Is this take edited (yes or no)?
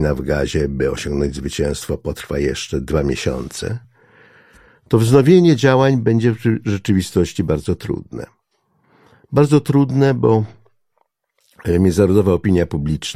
no